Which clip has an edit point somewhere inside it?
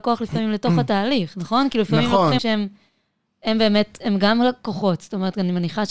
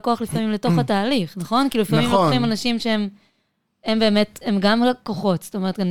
first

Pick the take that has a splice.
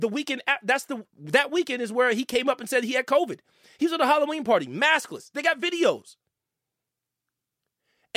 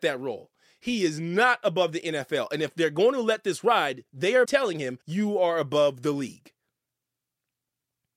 second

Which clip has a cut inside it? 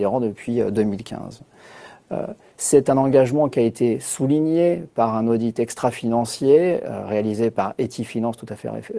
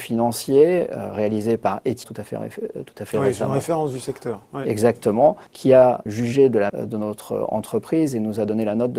second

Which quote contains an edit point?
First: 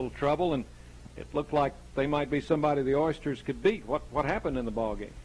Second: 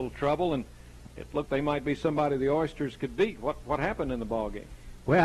second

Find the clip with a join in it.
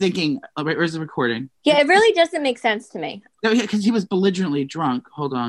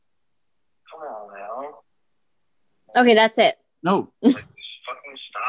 first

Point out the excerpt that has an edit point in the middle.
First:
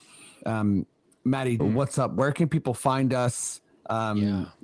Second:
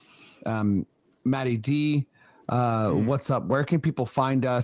first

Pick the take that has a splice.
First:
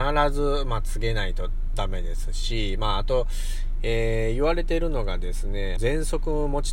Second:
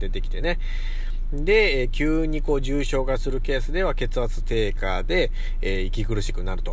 first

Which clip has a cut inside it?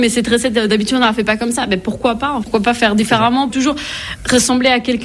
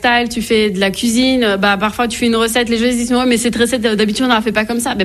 first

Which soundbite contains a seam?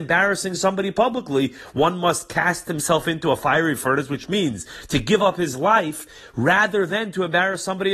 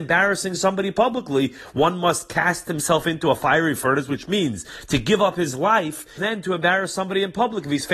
second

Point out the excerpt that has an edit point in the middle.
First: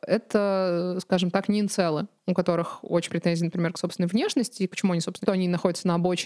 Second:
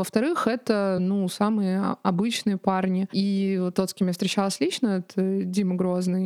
first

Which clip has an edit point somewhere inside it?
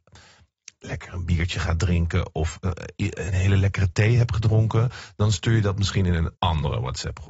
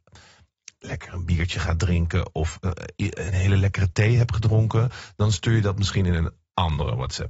first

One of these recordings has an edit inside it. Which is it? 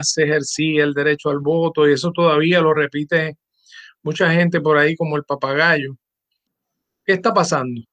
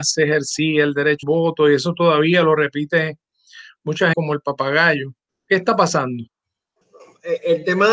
second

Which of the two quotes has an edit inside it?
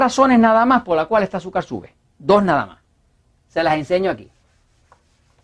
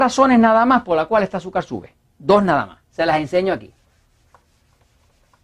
second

